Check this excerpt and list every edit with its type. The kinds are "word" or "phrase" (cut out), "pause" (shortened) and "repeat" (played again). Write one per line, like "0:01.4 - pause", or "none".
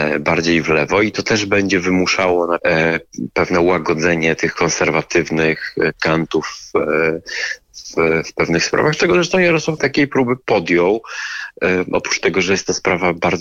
0:02.6 - word
0:09.8 - word